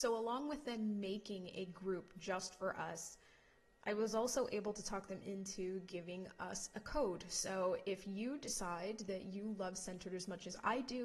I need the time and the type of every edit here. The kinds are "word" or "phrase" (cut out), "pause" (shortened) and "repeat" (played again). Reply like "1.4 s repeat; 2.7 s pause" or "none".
none